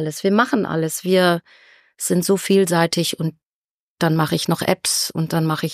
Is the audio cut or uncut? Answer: uncut